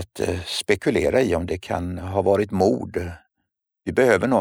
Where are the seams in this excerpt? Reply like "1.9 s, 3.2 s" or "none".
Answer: none

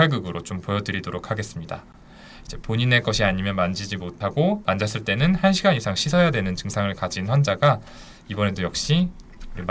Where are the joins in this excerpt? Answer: none

